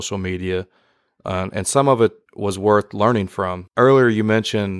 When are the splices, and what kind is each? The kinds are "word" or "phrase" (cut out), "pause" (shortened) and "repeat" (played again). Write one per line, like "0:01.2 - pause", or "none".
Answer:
0:02.2 - pause
0:03.7 - pause